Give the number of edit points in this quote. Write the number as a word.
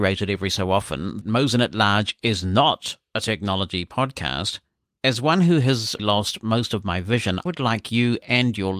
three